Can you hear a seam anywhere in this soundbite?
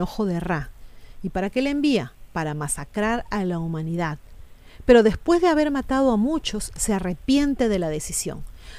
no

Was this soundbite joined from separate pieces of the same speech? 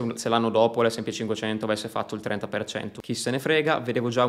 no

